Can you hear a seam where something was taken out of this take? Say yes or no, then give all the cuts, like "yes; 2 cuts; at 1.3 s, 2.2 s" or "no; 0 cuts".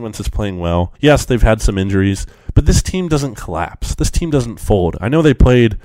yes; 1 cut; at 0.9 s